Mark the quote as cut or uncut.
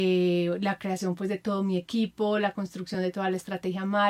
uncut